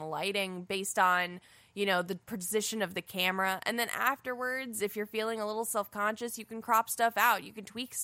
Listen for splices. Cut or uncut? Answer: uncut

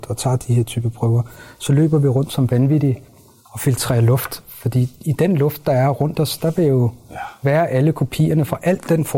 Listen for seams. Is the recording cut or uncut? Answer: uncut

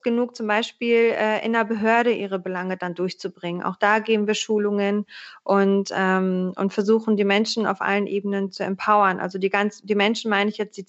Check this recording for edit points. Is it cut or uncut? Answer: uncut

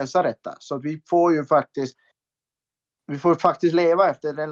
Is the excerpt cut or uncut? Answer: uncut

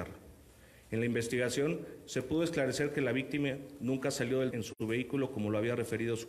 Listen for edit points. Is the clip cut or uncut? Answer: cut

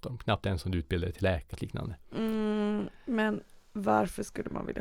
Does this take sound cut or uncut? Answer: cut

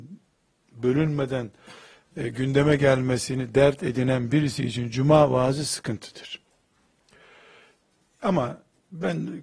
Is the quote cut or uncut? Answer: uncut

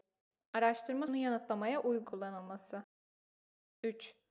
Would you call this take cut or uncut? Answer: cut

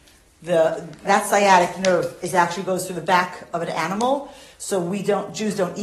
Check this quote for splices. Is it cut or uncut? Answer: cut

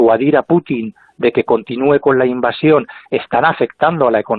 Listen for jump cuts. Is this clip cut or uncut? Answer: uncut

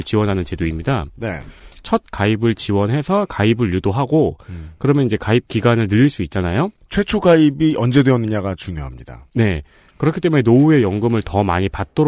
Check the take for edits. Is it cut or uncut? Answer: uncut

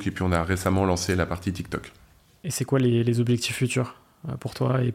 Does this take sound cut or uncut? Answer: uncut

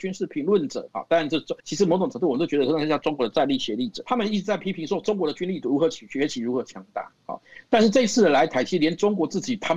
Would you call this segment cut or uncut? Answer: cut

